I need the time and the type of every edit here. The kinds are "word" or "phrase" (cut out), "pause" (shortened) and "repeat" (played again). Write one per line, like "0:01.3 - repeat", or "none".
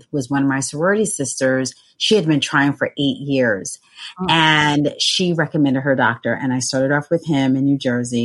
none